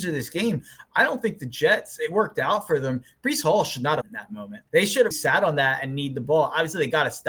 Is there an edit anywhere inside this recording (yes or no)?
yes